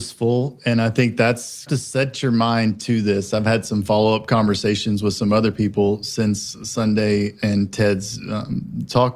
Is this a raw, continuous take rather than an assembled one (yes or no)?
no